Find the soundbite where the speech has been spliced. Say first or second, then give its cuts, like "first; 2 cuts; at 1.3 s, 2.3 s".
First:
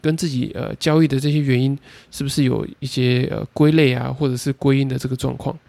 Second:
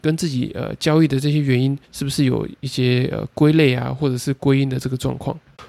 second; 1 cut; at 1.8 s